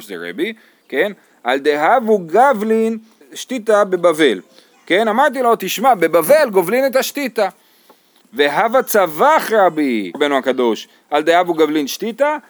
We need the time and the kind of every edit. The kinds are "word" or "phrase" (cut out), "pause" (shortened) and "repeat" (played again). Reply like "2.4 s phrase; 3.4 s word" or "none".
3.2 s word; 10.1 s word